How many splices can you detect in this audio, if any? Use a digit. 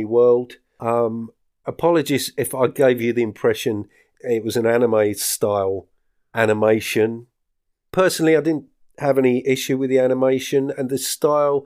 0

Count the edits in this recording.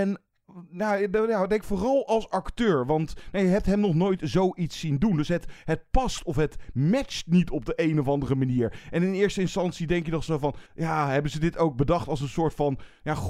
1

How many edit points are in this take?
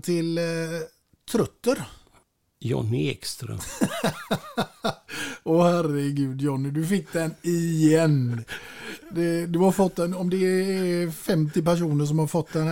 0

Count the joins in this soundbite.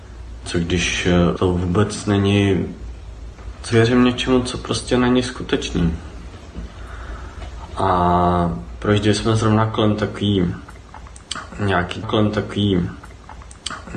3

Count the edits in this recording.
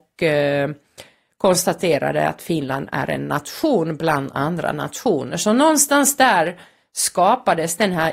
0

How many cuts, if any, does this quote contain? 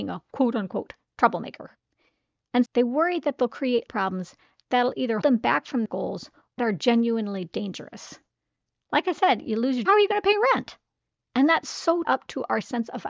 7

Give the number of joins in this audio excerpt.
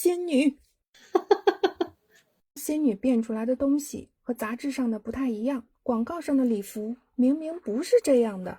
2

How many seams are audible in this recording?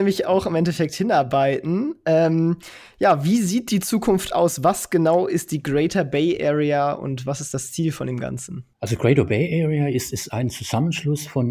1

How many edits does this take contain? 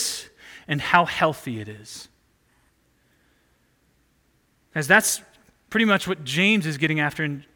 0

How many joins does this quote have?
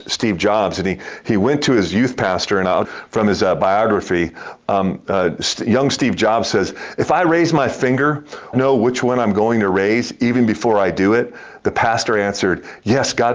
2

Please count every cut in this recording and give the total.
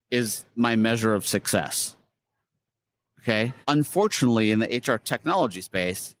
1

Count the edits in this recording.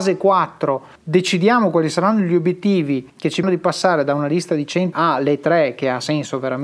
4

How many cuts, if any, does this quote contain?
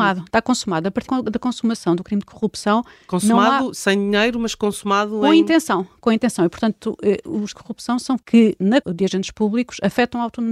4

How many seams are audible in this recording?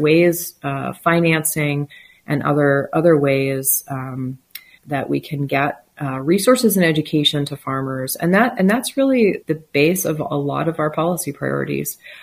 2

